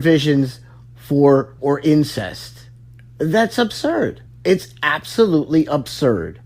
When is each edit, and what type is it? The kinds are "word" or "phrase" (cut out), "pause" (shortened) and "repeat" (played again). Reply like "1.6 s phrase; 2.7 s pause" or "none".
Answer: 1.6 s word; 2.8 s pause; 4.3 s pause